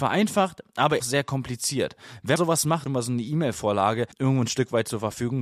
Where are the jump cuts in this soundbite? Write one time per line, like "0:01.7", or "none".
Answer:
0:01.0
0:02.4
0:02.9
0:04.1